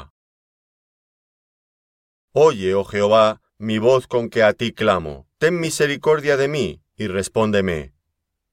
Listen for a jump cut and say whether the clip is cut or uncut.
cut